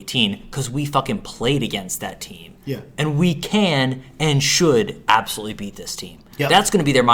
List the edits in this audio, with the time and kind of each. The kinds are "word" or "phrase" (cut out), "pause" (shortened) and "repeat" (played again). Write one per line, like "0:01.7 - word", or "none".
none